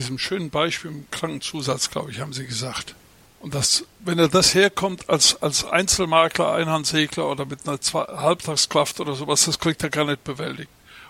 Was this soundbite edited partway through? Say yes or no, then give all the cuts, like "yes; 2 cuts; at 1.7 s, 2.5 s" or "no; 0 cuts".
yes; 1 cut; at 3.3 s